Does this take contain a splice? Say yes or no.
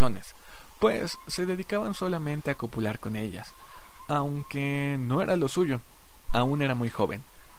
yes